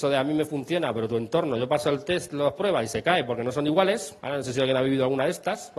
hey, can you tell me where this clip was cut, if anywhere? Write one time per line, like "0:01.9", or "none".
0:04.2